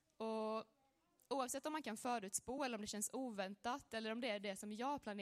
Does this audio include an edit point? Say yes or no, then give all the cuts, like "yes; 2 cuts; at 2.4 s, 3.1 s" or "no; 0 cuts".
no; 0 cuts